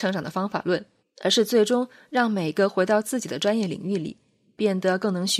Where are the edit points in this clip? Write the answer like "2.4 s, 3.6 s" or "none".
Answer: 1.0 s